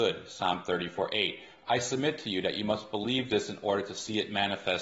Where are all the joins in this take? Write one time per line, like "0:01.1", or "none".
none